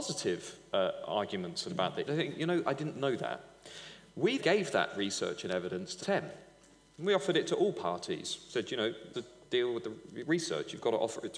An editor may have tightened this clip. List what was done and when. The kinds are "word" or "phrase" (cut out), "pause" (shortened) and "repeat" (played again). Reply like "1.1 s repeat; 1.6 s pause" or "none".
1.7 s word; 2.1 s word; 2.6 s word; 4.4 s word; 6.0 s word; 9.1 s word